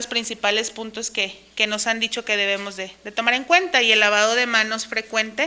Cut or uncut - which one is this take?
uncut